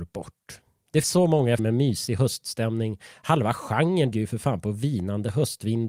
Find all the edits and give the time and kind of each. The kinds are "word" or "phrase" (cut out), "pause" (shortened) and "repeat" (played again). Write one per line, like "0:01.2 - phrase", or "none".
0:01.0 - word
0:01.6 - word
0:04.1 - word